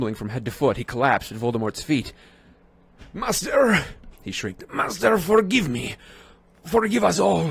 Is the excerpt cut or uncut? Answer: uncut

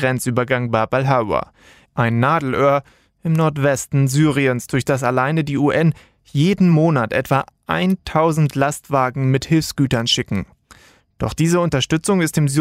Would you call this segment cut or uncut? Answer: uncut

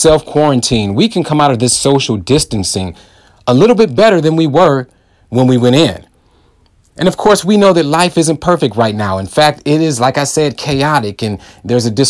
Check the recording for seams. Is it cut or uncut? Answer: uncut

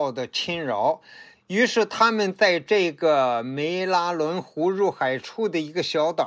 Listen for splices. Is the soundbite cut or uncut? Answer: uncut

